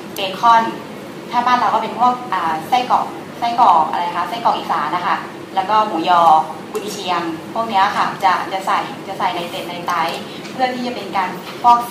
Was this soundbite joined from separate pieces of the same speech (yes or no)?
no